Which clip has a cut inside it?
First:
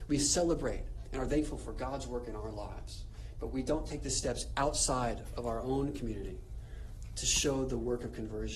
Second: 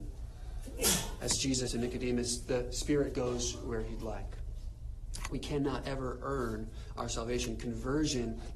second; 1 cut; at 1.7 s

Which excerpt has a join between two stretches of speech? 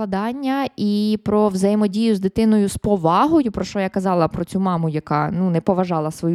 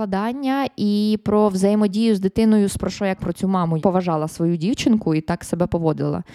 second; 3 cuts; at 2.8 s, 3.2 s, 3.8 s

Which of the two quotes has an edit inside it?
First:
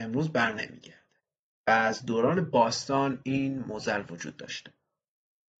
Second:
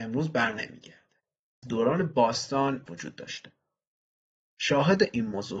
second; 2 cuts; at 1.6 s, 2.9 s

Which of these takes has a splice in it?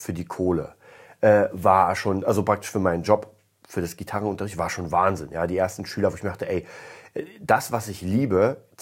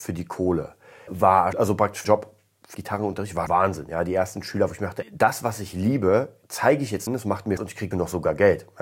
second; 9 cuts; at 1.1 s, 1.5 s, 2.0 s, 2.7 s, 3.5 s, 5.0 s, 7.1 s, 7.6 s, 7.9 s

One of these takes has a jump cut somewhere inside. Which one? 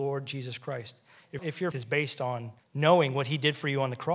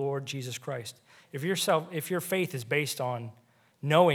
first; 3 cuts; at 1.4 s, 1.7 s, 2.6 s

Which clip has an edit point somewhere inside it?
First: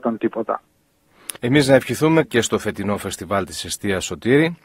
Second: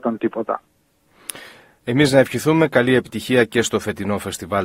first; 2 cuts; at 1.4 s, 2.2 s

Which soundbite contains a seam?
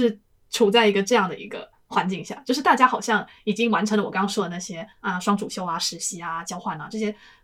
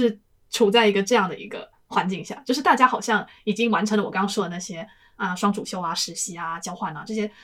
first; 1 cut; at 4.9 s

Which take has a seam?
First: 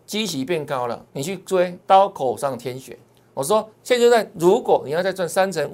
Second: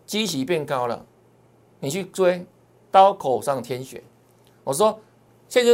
first; 4 cuts; at 1.1 s, 1.8 s, 3.1 s, 3.7 s

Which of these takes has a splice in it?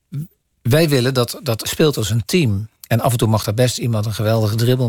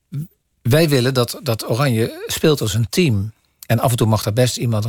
first; 2 cuts; at 1.6 s, 2.8 s

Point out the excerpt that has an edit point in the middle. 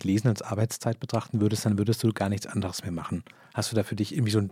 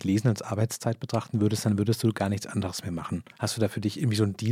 second; 1 cut; at 3.3 s

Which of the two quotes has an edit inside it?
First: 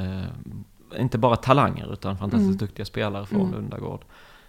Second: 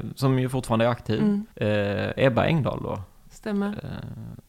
second; 1 cut; at 1.5 s

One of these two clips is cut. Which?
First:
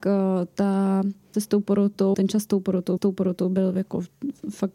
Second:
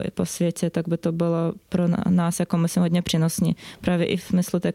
first; 3 cuts; at 1.3 s, 2.1 s, 3.0 s

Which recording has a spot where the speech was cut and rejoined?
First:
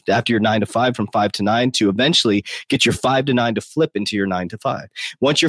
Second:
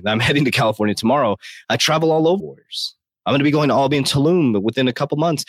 second; 1 cut; at 2.4 s

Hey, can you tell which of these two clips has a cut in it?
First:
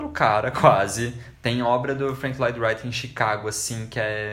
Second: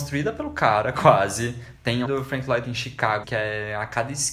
second; 3 cuts; at 2.0 s, 2.6 s, 3.2 s

